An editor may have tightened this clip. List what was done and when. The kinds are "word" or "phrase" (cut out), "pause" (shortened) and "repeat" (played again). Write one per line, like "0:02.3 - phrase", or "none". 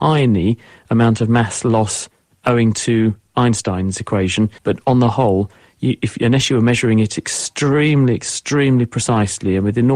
0:04.6 - pause